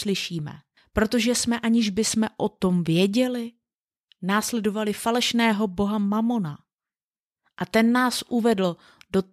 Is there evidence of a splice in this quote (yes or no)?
no